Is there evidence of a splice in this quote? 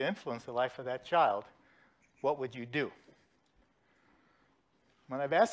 no; 0 cuts

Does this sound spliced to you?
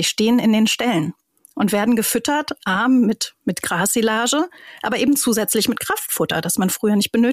no; 0 cuts

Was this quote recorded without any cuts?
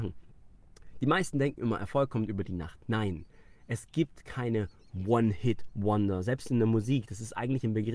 yes; 0 cuts

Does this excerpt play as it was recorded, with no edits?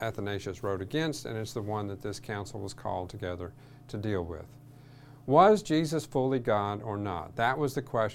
yes; 0 cuts

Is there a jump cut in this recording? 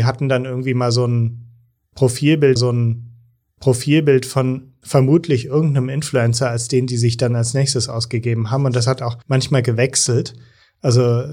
yes; 2 cuts; at 2.6 s, 9.2 s

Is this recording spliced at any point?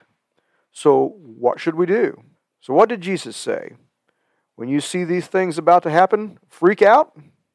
yes; 1 cut; at 2.3 s

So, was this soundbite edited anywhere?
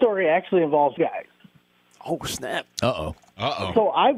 yes; 1 cut; at 1.0 s

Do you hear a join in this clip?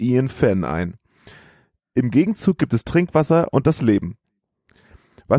no; 0 cuts

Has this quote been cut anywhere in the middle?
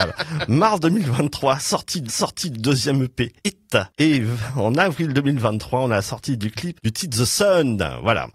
yes; 1 cut; at 2.1 s

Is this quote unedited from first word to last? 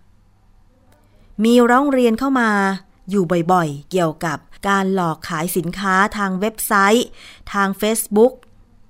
no; 1 cut; at 4.6 s

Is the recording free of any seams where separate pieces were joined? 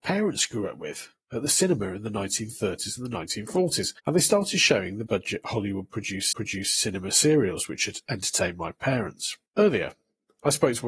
no; 4 cuts; at 4.0 s, 5.1 s, 6.3 s, 9.5 s

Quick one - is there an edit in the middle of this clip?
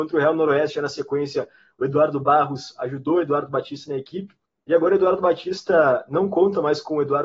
no; 0 cuts

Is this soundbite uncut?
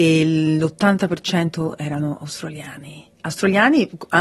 no; 1 cut; at 3.1 s

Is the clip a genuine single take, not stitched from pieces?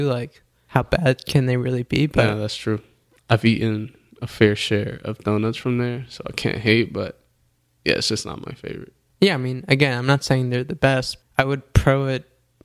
no; 1 cut; at 11.2 s

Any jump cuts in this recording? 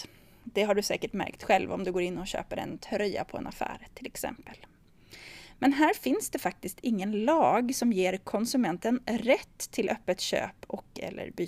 no; 0 cuts

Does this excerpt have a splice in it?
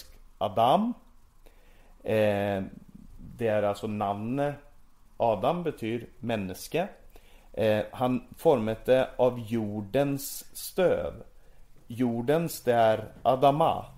no; 0 cuts

